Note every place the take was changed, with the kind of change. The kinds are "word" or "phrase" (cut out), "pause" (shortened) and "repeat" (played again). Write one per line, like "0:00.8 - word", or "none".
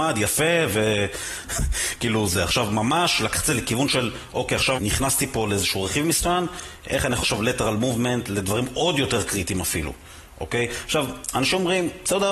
0:04.8 - word
0:07.2 - word